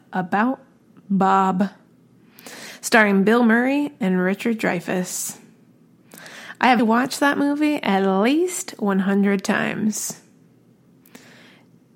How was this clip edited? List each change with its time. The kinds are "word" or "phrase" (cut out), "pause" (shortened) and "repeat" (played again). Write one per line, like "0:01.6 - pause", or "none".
0:06.8 - word